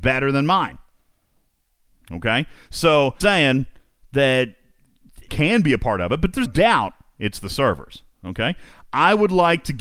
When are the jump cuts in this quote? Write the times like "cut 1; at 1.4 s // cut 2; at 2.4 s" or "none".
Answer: cut 1; at 3.2 s // cut 2; at 5.3 s // cut 3; at 6.5 s

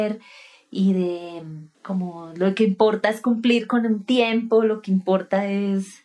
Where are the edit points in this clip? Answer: cut 1; at 1.7 s

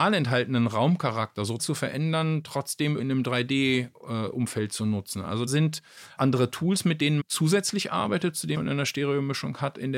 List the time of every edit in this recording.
cut 1; at 1.6 s // cut 2; at 3.0 s // cut 3; at 5.5 s // cut 4; at 6.2 s // cut 5; at 7.2 s // cut 6; at 8.5 s

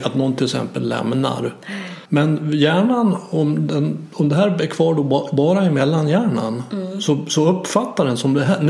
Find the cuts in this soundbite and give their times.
cut 1; at 2.1 s

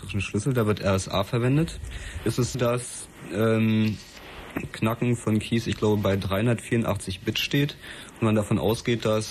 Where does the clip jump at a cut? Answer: cut 1; at 2.5 s // cut 2; at 4.7 s

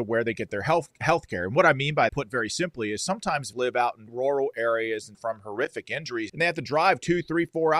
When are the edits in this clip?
cut 1; at 2.1 s // cut 2; at 3.5 s // cut 3; at 4.1 s // cut 4; at 5.1 s // cut 5; at 6.3 s

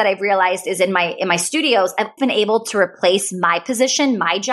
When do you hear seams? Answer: cut 1; at 2.2 s

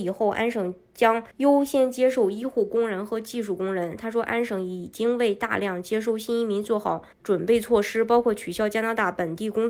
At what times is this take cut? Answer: cut 1; at 1.3 s // cut 2; at 7.1 s

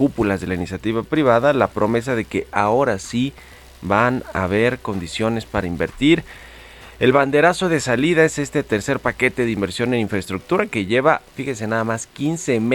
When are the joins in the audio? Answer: none

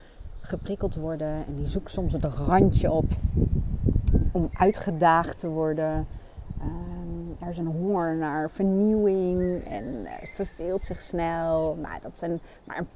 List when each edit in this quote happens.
none

